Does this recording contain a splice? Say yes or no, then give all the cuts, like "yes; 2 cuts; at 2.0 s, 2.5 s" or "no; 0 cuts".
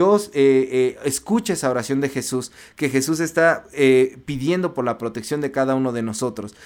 no; 0 cuts